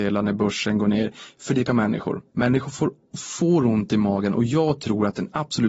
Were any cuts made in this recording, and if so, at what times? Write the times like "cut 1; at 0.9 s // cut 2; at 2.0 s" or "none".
cut 1; at 1.7 s // cut 2; at 2.3 s

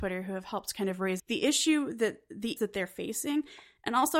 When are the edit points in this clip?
cut 1; at 1.2 s // cut 2; at 2.6 s

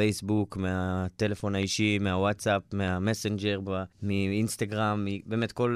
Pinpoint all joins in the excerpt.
cut 1; at 3.9 s

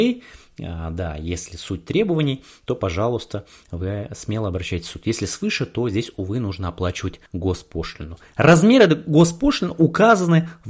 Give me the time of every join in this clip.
cut 1; at 7.3 s

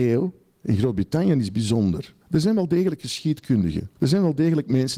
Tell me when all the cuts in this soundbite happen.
cut 1; at 2.2 s // cut 2; at 4.0 s

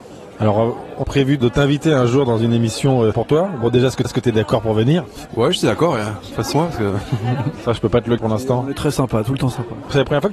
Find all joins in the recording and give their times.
cut 1; at 1.0 s // cut 2; at 3.1 s // cut 3; at 4.0 s // cut 4; at 6.5 s // cut 5; at 8.2 s

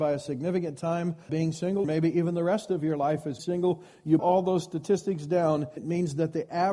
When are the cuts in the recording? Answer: cut 1; at 1.3 s // cut 2; at 1.8 s // cut 3; at 3.4 s // cut 4; at 4.2 s // cut 5; at 5.8 s

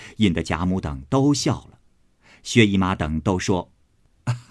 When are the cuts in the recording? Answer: none

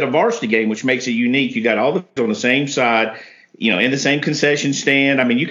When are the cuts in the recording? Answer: cut 1; at 2.2 s

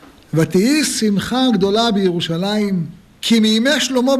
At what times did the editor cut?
none

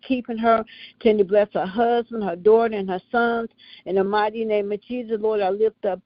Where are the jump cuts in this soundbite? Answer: none

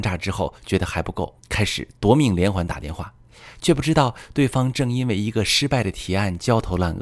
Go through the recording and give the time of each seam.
cut 1; at 1.4 s

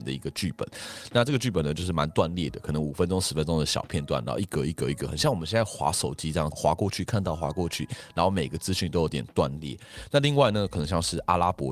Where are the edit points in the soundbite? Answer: cut 1; at 6.5 s

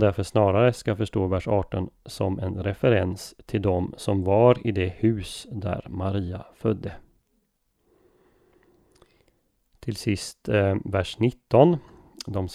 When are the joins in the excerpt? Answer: none

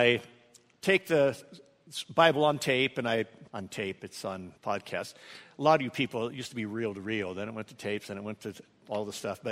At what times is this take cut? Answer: cut 1; at 3.5 s // cut 2; at 4.6 s

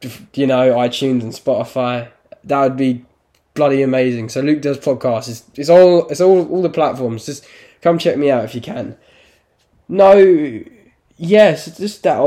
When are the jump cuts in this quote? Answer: none

